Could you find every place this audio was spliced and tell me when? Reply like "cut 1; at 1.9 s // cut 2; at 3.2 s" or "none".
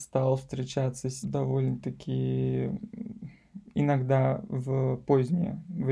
cut 1; at 1.2 s